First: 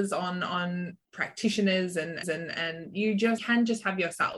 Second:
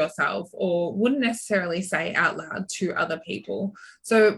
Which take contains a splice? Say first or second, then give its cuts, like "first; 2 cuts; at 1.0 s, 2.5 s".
first; 2 cuts; at 2.2 s, 3.4 s